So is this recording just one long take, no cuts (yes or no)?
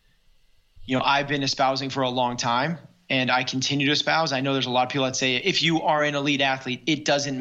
yes